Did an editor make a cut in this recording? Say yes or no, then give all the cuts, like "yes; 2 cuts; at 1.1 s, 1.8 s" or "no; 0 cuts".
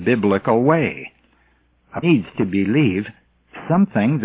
yes; 1 cut; at 2.0 s